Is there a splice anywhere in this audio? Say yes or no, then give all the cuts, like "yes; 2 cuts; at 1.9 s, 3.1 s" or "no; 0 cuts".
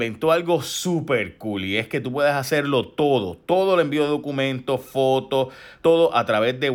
yes; 1 cut; at 5.8 s